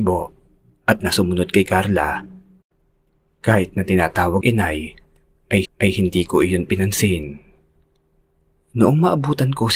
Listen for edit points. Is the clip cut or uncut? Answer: cut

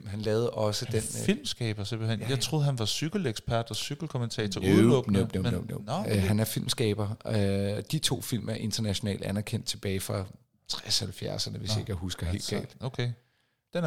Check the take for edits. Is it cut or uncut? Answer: uncut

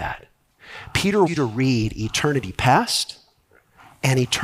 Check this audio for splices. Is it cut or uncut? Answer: cut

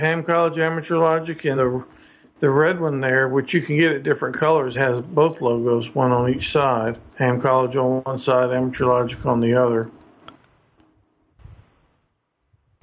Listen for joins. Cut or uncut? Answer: cut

